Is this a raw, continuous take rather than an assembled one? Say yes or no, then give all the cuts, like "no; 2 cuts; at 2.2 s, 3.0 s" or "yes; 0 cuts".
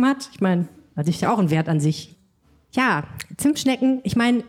no; 1 cut; at 1.2 s